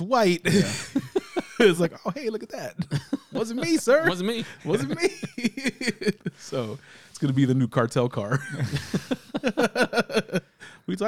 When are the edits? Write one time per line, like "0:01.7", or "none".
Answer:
none